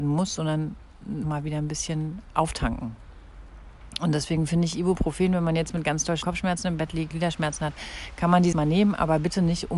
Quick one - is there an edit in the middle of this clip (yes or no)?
yes